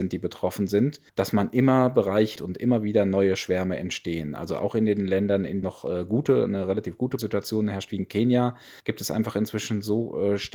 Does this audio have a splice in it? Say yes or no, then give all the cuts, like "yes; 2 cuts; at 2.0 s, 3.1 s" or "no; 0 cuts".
yes; 5 cuts; at 1.1 s, 2.4 s, 5.6 s, 7.2 s, 8.8 s